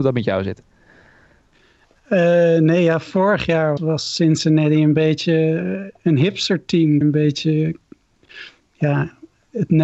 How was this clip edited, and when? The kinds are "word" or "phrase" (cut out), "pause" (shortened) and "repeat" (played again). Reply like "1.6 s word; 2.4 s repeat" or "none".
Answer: 3.8 s word; 7.0 s word

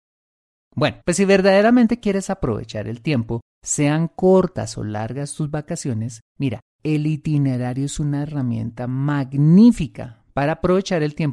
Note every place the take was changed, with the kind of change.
1.0 s pause; 3.5 s pause; 6.3 s pause

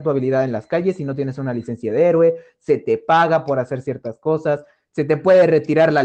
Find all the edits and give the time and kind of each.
none

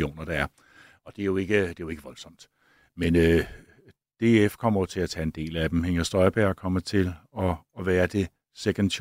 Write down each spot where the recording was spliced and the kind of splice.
none

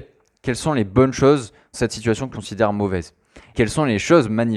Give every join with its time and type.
1.7 s word; 2.3 s word; 3.5 s word

